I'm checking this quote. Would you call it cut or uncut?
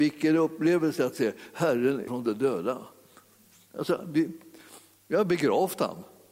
cut